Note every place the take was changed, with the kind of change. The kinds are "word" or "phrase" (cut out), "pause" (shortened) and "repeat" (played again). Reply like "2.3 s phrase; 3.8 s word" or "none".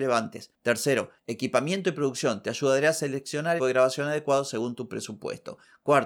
3.6 s phrase